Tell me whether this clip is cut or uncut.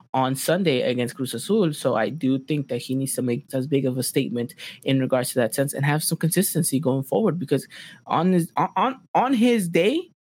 cut